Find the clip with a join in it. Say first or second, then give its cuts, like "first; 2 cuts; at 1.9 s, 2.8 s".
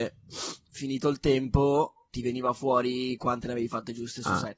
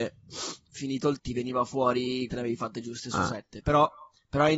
second; 2 cuts; at 1.2 s, 2.3 s